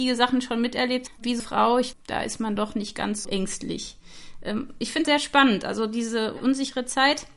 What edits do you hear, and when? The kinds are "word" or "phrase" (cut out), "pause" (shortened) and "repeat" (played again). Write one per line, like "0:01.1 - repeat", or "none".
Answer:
0:01.1 - word
0:01.4 - word
0:01.9 - word
0:02.6 - word
0:03.2 - word
0:05.0 - word